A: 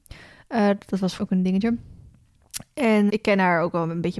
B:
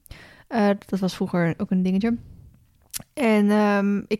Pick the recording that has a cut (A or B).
A